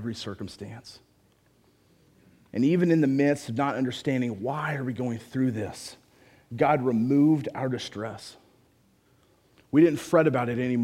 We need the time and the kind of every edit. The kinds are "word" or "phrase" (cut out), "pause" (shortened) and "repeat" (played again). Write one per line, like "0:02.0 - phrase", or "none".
none